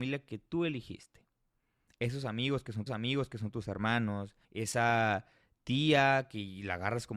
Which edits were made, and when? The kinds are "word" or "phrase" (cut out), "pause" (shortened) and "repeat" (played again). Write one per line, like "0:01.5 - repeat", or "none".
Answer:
0:02.9 - repeat
0:04.4 - pause